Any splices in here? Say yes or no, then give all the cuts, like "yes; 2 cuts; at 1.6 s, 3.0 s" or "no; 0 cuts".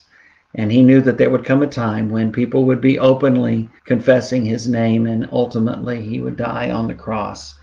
yes; 1 cut; at 3.8 s